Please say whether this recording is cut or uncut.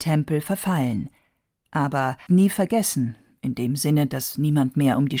cut